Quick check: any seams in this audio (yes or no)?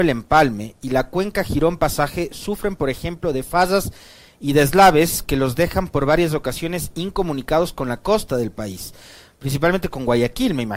no